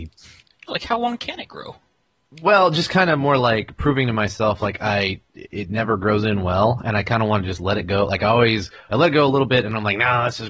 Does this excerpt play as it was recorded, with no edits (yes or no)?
yes